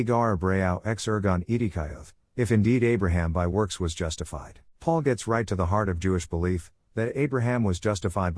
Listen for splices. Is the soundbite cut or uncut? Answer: cut